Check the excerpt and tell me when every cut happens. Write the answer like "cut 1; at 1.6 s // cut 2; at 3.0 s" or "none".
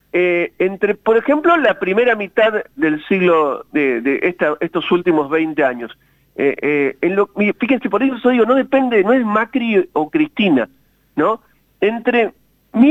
none